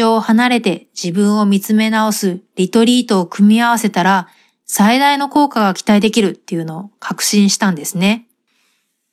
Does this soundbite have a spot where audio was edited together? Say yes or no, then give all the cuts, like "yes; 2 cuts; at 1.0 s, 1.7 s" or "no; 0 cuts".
no; 0 cuts